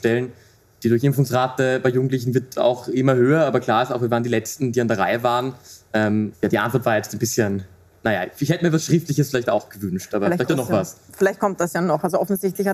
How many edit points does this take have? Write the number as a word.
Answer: two